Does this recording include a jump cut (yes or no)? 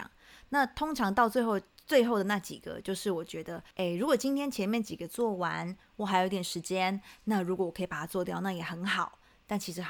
yes